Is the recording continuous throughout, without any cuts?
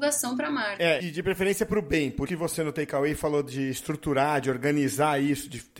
no; 2 cuts; at 1.0 s, 2.3 s

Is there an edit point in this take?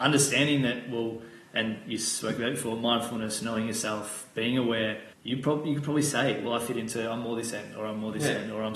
yes; 1 cut; at 5.1 s

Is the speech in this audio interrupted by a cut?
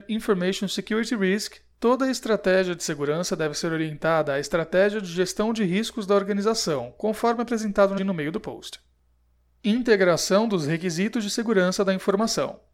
yes; 1 cut; at 8.0 s

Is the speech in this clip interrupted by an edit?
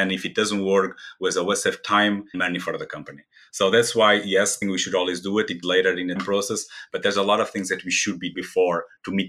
yes; 5 cuts; at 2.3 s, 4.6 s, 5.6 s, 6.2 s, 8.3 s

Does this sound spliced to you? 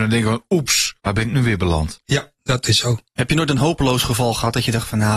yes; 1 cut; at 1.0 s

